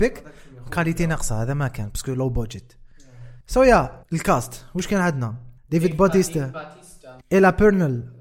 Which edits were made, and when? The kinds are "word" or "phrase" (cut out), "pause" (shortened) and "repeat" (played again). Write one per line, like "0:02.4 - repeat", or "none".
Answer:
0:03.4 - pause
0:04.0 - pause
0:05.6 - pause
0:07.2 - pause